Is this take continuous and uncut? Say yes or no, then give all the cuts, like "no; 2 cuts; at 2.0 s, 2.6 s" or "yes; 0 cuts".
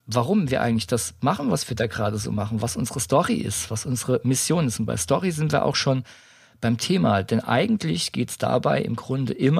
yes; 0 cuts